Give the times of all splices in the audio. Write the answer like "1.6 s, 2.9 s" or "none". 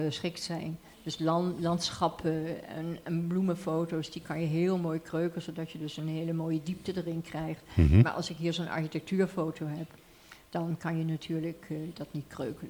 0.9 s